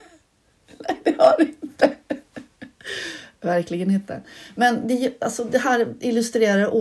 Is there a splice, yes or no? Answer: no